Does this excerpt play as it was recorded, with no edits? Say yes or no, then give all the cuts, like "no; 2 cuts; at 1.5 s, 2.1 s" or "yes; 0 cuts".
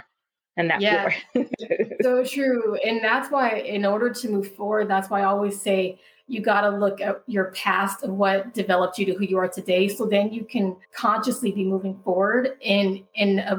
no; 1 cut; at 10.8 s